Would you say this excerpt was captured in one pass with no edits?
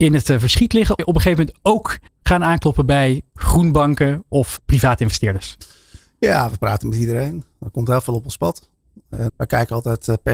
no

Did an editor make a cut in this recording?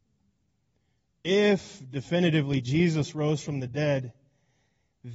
no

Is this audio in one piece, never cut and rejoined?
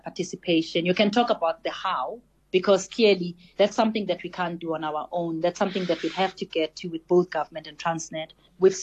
yes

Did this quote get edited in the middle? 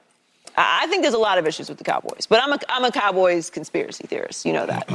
no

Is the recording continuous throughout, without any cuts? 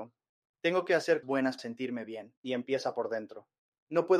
no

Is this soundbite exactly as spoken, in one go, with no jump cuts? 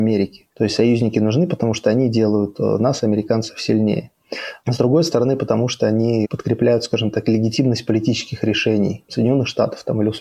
yes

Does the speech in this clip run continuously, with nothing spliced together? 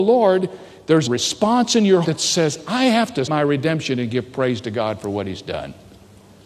no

